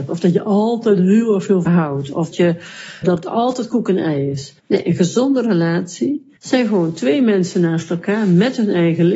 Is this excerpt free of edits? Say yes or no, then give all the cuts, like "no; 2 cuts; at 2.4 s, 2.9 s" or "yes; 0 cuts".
no; 5 cuts; at 1.7 s, 2.3 s, 3.0 s, 4.6 s, 6.4 s